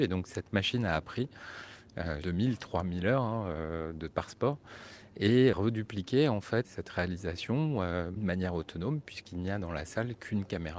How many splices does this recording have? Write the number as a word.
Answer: five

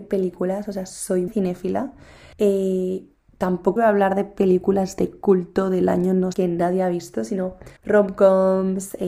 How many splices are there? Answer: five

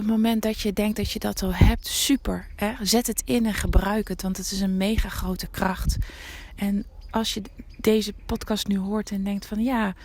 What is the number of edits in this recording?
zero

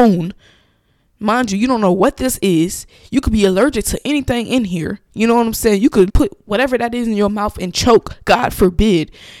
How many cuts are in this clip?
one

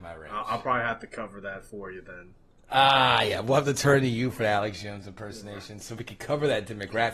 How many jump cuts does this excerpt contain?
one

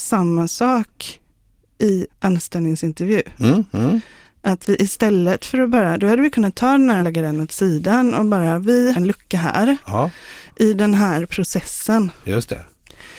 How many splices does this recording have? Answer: three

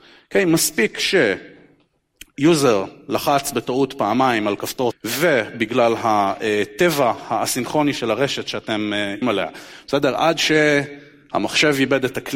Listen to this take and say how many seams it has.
two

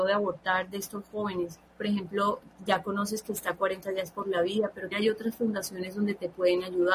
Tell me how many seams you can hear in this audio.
two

